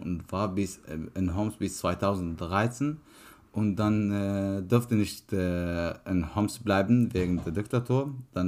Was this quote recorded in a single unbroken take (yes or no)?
yes